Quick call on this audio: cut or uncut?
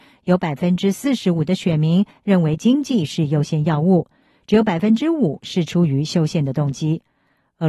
uncut